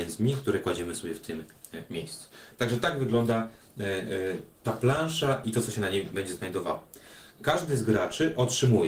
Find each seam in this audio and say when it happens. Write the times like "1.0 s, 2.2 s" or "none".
4.5 s